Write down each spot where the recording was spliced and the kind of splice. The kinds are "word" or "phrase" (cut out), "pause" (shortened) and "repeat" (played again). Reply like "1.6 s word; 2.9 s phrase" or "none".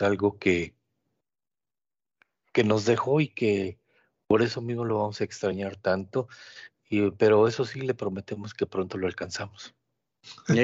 none

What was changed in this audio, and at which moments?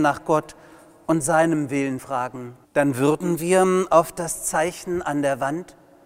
2.0 s word; 2.6 s pause

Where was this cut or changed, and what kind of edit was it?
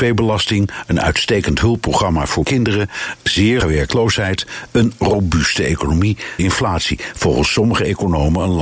2.4 s word; 3.6 s word; 6.4 s word

